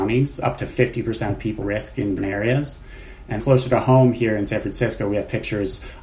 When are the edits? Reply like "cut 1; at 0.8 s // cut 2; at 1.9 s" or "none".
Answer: cut 1; at 1.6 s // cut 2; at 2.2 s // cut 3; at 3.4 s